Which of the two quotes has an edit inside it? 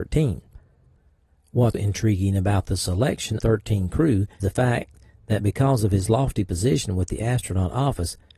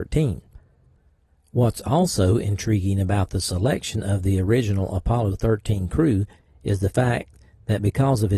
first; 3 cuts; at 1.7 s, 3.4 s, 4.4 s

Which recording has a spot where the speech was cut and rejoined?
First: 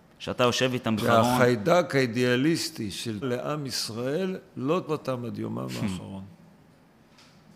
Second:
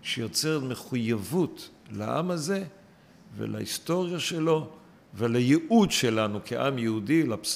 first; 3 cuts; at 1.0 s, 3.2 s, 4.9 s

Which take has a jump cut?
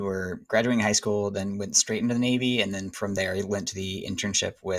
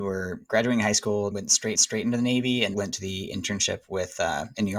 second; 3 cuts; at 1.3 s, 1.7 s, 2.7 s

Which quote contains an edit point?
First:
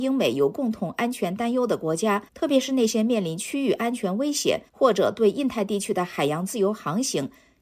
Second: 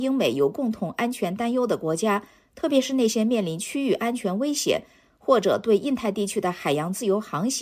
first; 2 cuts; at 2.3 s, 4.7 s

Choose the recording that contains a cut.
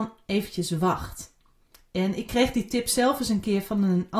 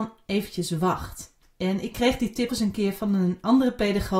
second; 2 cuts; at 1.4 s, 2.5 s

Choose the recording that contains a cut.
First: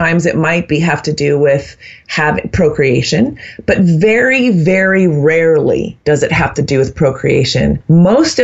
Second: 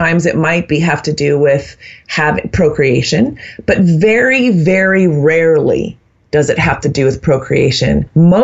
first; 1 cut; at 6.0 s

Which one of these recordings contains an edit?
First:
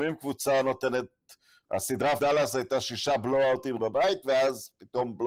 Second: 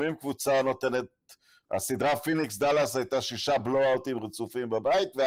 first; 2 cuts; at 2.2 s, 3.8 s

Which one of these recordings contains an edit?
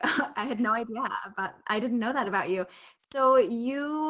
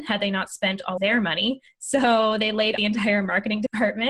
second; 2 cuts; at 1.0 s, 2.8 s

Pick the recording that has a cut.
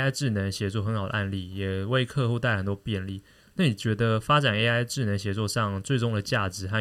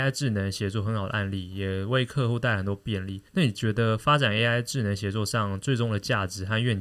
second; 1 cut; at 3.3 s

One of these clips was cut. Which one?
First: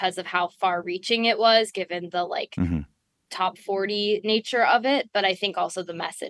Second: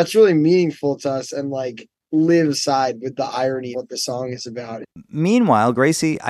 second; 2 cuts; at 2.5 s, 3.7 s

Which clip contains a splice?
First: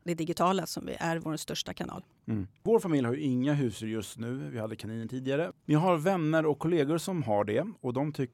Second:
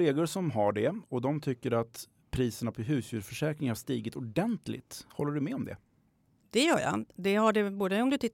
first; 1 cut; at 2.6 s

